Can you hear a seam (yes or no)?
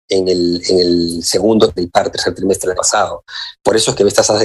yes